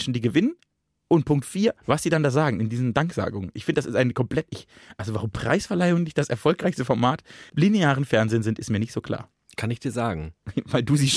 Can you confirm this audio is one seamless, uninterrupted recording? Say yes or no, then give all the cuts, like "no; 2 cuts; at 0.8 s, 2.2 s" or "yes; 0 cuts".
no; 2 cuts; at 1.8 s, 7.5 s